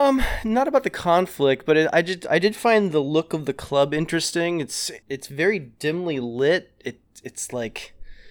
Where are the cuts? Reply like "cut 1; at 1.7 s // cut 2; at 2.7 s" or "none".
cut 1; at 5.0 s